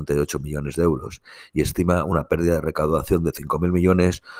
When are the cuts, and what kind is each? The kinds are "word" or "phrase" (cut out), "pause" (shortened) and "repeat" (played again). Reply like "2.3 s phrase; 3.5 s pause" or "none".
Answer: none